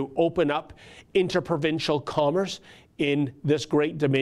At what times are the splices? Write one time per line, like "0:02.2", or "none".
none